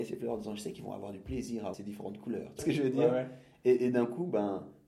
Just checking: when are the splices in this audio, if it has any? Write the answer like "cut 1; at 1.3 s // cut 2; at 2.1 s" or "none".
cut 1; at 1.7 s // cut 2; at 2.6 s